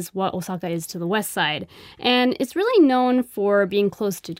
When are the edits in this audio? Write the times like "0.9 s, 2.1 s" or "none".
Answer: none

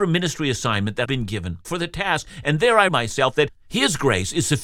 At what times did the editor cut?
1.0 s, 1.6 s, 2.9 s

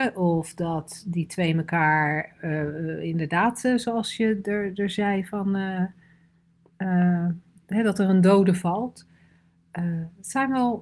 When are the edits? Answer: none

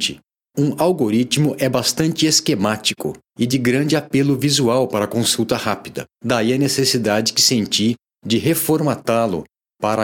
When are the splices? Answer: 6.1 s

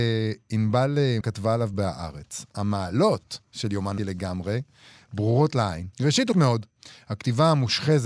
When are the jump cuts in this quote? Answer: 1.2 s, 1.7 s, 3.4 s, 4.0 s, 5.9 s, 6.3 s

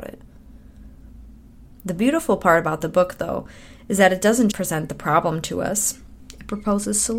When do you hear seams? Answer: 4.5 s

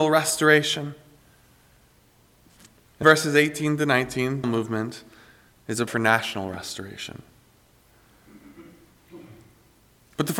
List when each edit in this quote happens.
3.0 s, 4.4 s, 5.9 s

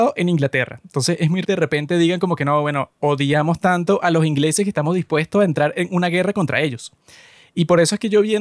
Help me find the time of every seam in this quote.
1.4 s

